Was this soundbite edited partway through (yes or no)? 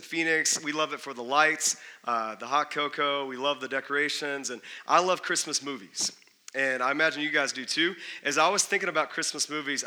no